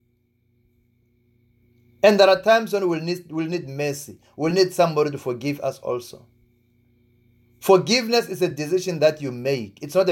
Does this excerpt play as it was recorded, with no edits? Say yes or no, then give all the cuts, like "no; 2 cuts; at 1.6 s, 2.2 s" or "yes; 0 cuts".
yes; 0 cuts